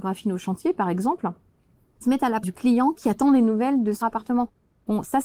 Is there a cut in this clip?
yes; 3 cuts; at 2.0 s, 2.4 s, 4.0 s

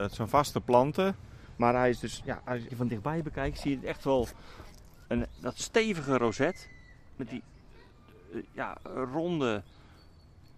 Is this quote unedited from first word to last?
no; 1 cut; at 2.7 s

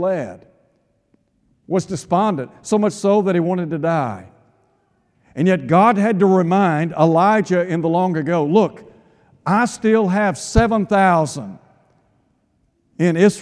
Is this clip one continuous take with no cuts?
yes; 0 cuts

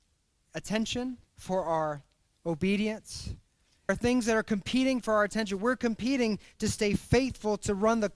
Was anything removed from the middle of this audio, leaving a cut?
yes; 2 cuts; at 1.3 s, 3.9 s

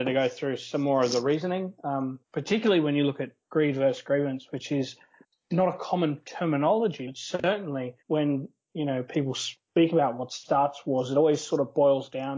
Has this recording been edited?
yes; 4 cuts; at 2.2 s, 3.4 s, 5.2 s, 8.0 s

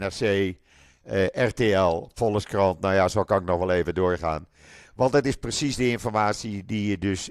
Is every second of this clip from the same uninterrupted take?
yes; 0 cuts

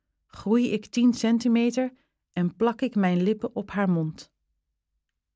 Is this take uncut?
yes; 0 cuts

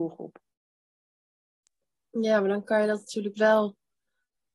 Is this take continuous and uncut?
yes; 0 cuts

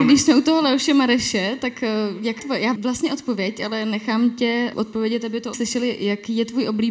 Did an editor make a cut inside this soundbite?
yes; 4 cuts; at 2.4 s, 2.8 s, 4.7 s, 5.5 s

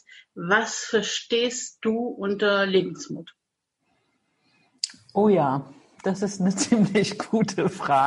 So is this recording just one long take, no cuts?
yes; 0 cuts

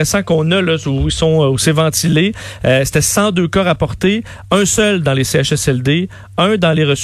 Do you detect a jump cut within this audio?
no; 0 cuts

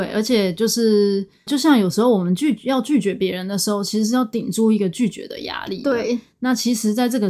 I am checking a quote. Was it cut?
yes; 1 cut; at 1.5 s

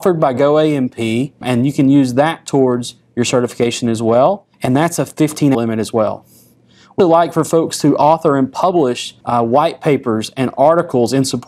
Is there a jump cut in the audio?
yes; 5 cuts; at 1.4 s, 4.5 s, 5.5 s, 7.0 s, 9.2 s

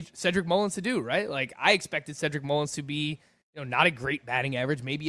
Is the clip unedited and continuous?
yes; 0 cuts

